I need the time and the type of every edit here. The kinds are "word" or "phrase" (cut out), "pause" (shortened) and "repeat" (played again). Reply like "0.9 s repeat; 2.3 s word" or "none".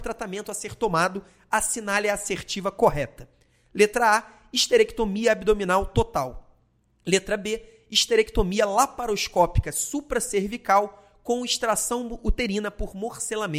none